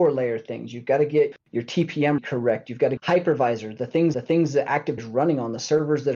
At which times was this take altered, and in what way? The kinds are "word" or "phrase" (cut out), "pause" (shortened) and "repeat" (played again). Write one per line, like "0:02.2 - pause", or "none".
0:01.3 - word
0:02.2 - phrase
0:03.0 - word
0:04.1 - repeat
0:05.0 - word